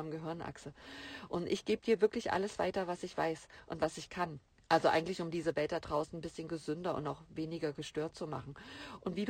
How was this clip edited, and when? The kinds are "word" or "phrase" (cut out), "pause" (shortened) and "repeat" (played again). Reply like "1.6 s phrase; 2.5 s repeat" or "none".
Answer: 4.5 s pause